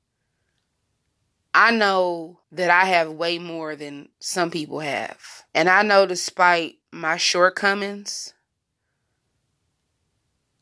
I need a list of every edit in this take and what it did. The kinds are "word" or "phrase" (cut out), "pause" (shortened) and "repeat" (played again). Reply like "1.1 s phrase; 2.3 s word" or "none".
2.4 s pause; 4.1 s pause; 5.5 s pause; 6.8 s pause